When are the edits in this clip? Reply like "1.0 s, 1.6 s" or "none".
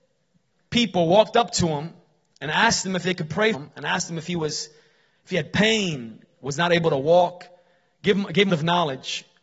3.5 s, 8.5 s

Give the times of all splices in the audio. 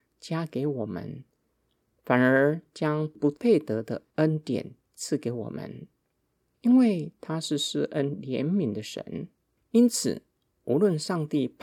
none

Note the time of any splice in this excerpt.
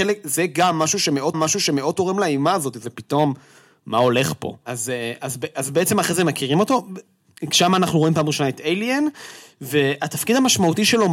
1.3 s

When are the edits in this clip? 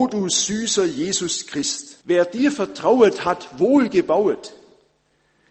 2.0 s

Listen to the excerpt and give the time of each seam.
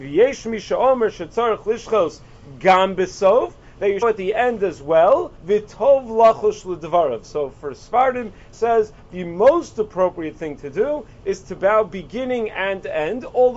4.0 s, 5.4 s, 8.5 s

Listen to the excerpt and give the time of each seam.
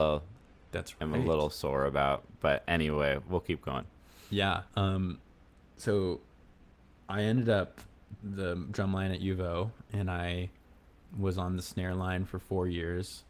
4.7 s, 8.2 s

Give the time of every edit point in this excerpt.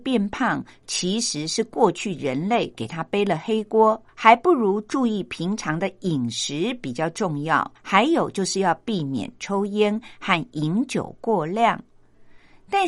4.1 s, 7.8 s

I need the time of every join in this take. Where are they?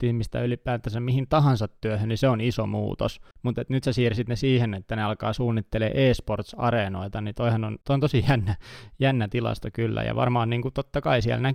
3.3 s, 7.8 s

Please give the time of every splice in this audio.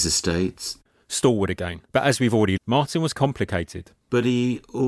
1.9 s, 2.6 s

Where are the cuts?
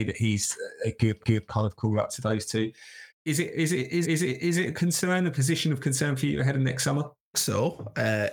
1.2 s, 3.1 s, 4.0 s, 7.3 s

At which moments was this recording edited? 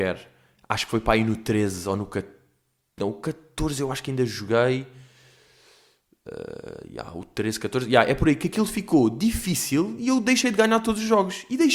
none

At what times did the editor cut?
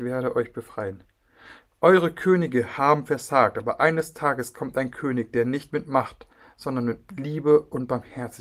none

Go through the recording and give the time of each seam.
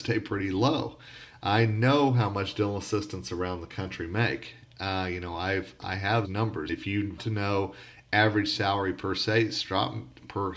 6.2 s, 6.7 s, 7.2 s

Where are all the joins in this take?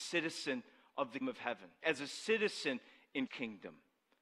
1.2 s, 1.8 s, 3.3 s

